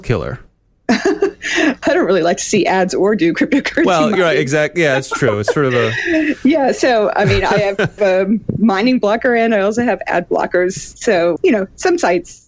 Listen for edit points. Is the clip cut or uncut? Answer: cut